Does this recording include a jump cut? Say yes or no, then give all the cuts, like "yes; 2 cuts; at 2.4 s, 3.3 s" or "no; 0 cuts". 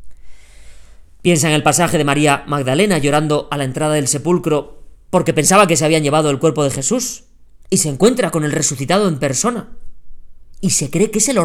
yes; 1 cut; at 7.6 s